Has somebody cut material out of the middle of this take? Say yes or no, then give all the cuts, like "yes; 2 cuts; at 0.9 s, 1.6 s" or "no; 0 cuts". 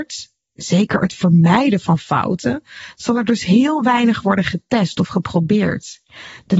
no; 0 cuts